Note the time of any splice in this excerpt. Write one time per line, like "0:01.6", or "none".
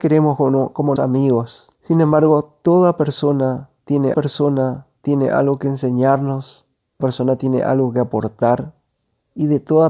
0:01.0
0:01.7
0:04.1
0:07.0